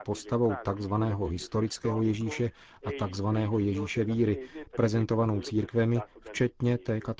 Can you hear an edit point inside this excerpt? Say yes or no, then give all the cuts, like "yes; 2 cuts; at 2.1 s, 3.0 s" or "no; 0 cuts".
no; 0 cuts